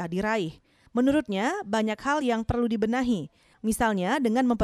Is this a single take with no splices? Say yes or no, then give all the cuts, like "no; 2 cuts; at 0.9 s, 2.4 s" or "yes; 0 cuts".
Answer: yes; 0 cuts